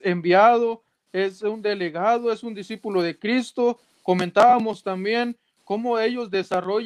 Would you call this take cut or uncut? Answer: uncut